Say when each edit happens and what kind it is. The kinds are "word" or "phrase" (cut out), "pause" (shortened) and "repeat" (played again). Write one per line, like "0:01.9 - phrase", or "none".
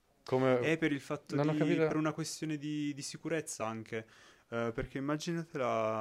none

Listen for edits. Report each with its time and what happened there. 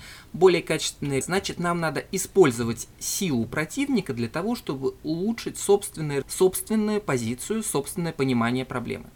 0:01.2 - word
0:06.2 - word

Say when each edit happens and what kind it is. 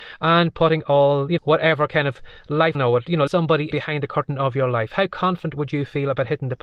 0:01.4 - word
0:02.7 - word
0:03.3 - word
0:03.7 - word

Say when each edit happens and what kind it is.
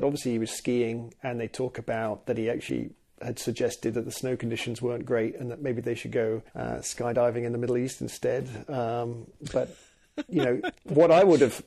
0:06.5 - pause

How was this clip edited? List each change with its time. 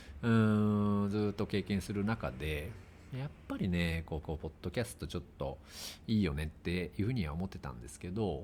0:04.2 - repeat

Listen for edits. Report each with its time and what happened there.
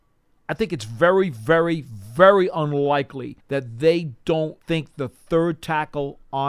0:03.4 - pause
0:04.6 - pause

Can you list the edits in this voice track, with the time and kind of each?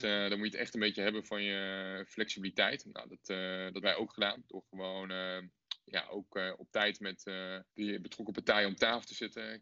0:03.8 - word
0:07.7 - pause

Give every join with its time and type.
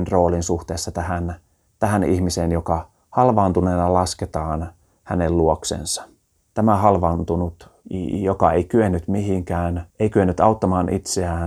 0:09.9 - pause

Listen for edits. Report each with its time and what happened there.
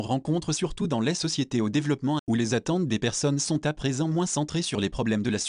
0:02.2 - word

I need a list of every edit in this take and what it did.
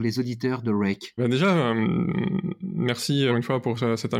0:01.2 - word
0:03.3 - word

